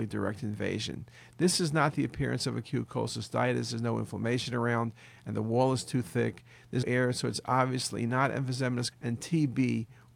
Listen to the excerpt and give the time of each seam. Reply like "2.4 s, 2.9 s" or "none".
6.8 s, 8.9 s